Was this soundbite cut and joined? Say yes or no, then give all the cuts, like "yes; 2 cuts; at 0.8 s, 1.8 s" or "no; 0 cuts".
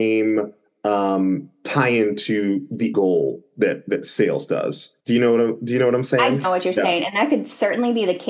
yes; 3 cuts; at 2.9 s, 5.0 s, 6.4 s